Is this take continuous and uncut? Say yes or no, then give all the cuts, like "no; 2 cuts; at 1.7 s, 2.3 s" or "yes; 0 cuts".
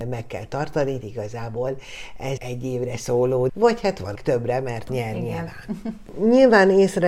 no; 5 cuts; at 1.0 s, 2.4 s, 3.5 s, 4.2 s, 4.9 s